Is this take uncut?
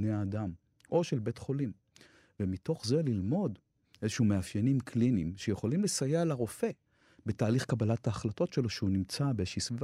yes; 0 cuts

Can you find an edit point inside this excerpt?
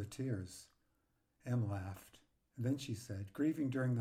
no; 0 cuts

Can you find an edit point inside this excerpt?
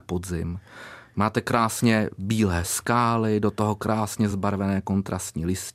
no; 0 cuts

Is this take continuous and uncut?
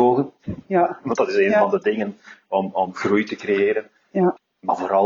yes; 0 cuts

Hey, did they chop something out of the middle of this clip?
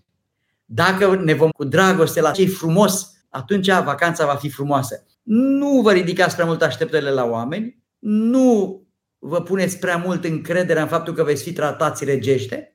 yes; 5 cuts; at 1.5 s, 2.3 s, 3.2 s, 5.1 s, 7.9 s

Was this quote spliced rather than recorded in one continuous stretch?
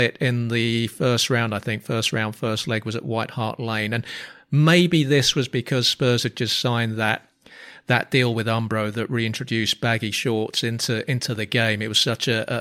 no; 0 cuts

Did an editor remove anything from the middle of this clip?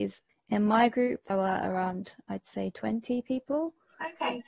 yes; 1 cut; at 1.3 s

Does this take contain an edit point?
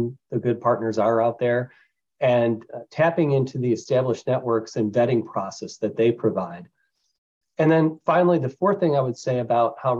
no; 0 cuts

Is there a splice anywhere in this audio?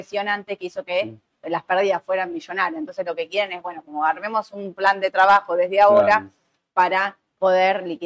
no; 0 cuts

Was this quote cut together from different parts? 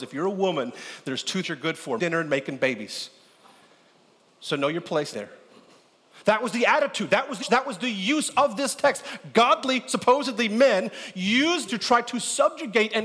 yes; 5 cuts; at 1.4 s, 2.0 s, 5.1 s, 7.4 s, 11.7 s

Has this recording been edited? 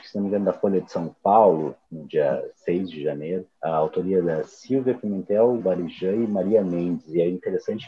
yes; 3 cuts; at 1.8 s, 3.5 s, 5.6 s

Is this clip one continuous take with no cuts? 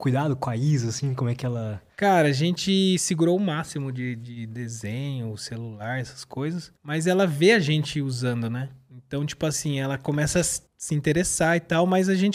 no; 2 cuts; at 6.8 s, 10.7 s

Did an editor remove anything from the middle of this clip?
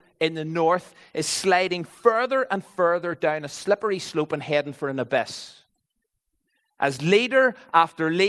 no; 0 cuts

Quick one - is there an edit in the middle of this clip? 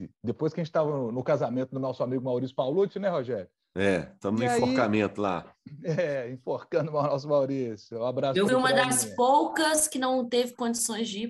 yes; 1 cut; at 8.5 s

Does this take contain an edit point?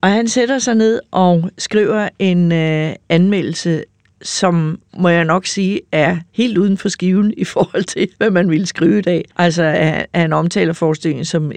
yes; 4 cuts; at 4.9 s, 6.3 s, 8.1 s, 9.3 s

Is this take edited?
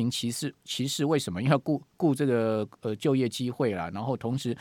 no; 0 cuts

